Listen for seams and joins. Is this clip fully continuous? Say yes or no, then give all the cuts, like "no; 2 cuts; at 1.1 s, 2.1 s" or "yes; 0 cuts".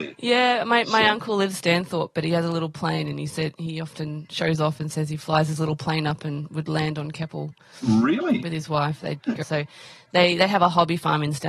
no; 1 cut; at 1.5 s